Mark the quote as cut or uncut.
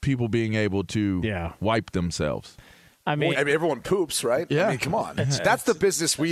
cut